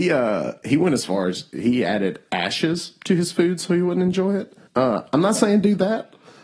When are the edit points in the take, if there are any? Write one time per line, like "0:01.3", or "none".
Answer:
0:04.7